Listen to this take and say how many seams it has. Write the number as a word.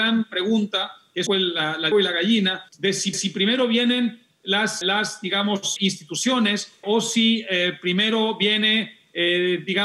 seven